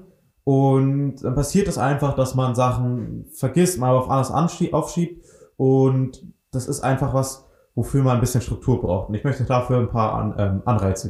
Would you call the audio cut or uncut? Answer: uncut